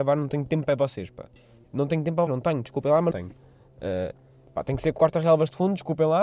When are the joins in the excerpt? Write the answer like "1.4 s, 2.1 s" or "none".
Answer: 1.6 s, 2.3 s, 3.1 s, 5.0 s